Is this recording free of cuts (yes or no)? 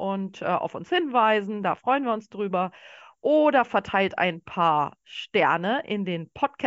yes